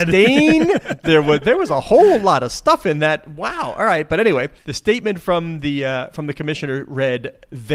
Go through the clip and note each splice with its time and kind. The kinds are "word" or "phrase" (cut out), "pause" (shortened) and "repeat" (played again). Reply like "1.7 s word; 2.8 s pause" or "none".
4.6 s pause